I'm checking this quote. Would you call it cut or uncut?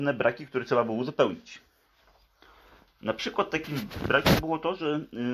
uncut